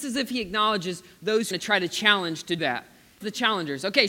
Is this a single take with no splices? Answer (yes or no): no